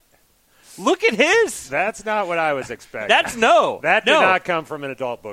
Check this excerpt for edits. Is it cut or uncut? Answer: uncut